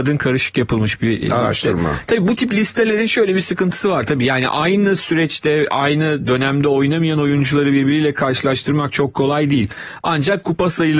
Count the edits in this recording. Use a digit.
1